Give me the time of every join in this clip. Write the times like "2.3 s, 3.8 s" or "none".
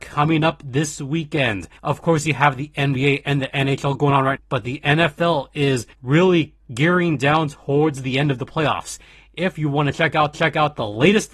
1.8 s, 4.4 s, 5.9 s, 10.3 s